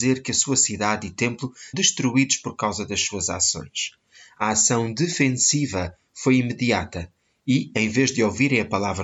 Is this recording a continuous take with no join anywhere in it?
no; 1 cut; at 1.7 s

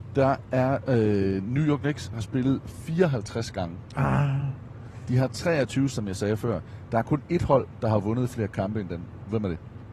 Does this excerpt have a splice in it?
yes; 1 cut; at 5.9 s

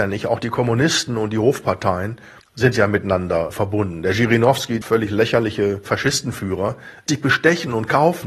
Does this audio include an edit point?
yes; 3 cuts; at 2.4 s, 4.8 s, 7.1 s

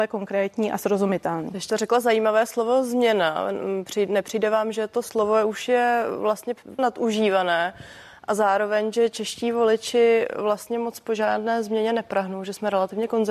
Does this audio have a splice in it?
yes; 2 cuts; at 1.7 s, 6.8 s

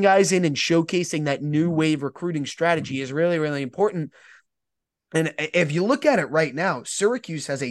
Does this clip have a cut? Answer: no; 0 cuts

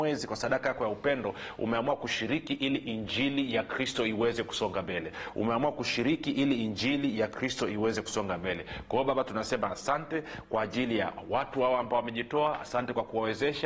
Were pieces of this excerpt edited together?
no; 0 cuts

